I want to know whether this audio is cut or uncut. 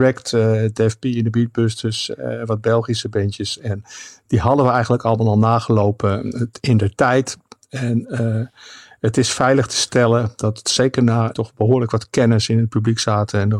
cut